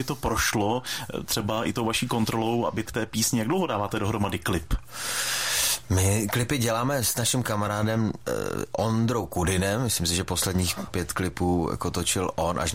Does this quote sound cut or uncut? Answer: cut